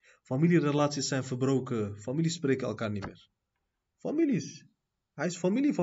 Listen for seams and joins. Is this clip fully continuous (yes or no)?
yes